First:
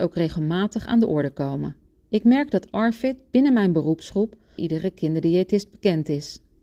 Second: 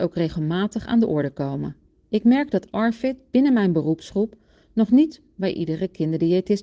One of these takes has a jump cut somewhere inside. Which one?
first; 1 cut; at 4.6 s

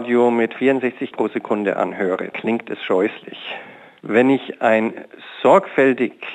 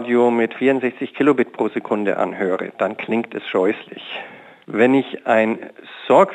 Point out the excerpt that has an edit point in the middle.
first; 2 cuts; at 1.1 s, 2.3 s

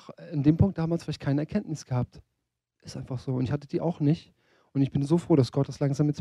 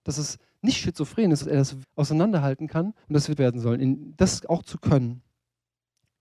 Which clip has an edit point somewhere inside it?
second; 4 cuts; at 1.4 s, 1.8 s, 3.0 s, 3.4 s

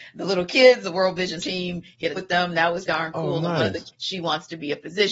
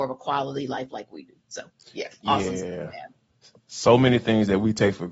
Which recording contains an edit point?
first; 4 cuts; at 1.4 s, 2.2 s, 2.9 s, 3.9 s

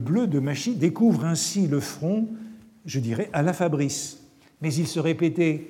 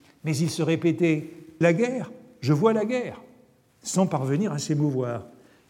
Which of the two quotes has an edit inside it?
second; 1 cut; at 1.6 s

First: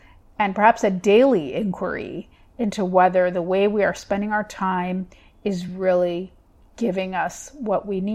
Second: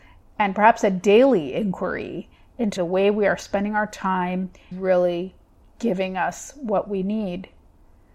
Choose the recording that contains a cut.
second; 2 cuts; at 2.8 s, 4.7 s

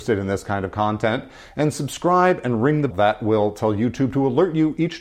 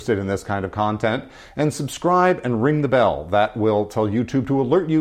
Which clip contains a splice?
first; 1 cut; at 2.9 s

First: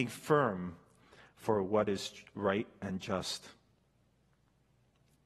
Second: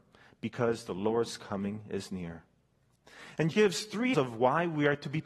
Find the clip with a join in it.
second; 2 cuts; at 3.5 s, 4.1 s

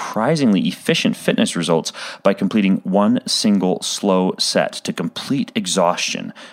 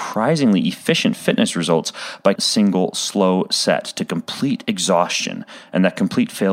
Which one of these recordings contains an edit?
second; 1 cut; at 2.4 s

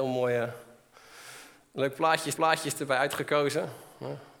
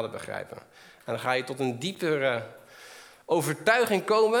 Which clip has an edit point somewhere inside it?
first; 1 cut; at 2.3 s

